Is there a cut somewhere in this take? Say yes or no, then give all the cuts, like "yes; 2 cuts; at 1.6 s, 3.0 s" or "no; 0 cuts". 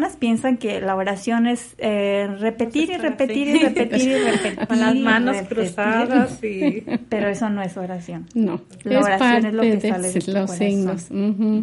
no; 0 cuts